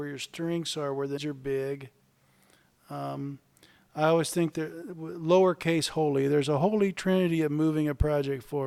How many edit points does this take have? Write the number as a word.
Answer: one